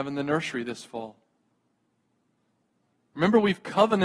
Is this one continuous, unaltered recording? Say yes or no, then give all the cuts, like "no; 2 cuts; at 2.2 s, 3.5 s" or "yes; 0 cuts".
yes; 0 cuts